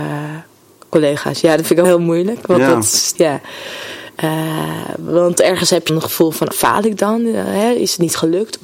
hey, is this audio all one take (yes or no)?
no